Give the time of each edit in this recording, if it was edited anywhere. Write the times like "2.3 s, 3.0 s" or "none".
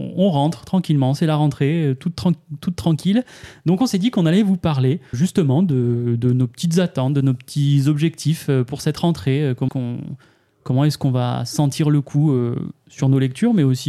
5.1 s, 9.7 s